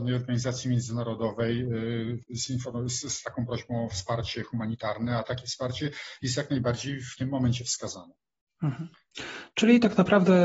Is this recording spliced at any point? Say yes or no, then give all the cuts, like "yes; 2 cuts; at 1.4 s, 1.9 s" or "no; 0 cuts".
no; 0 cuts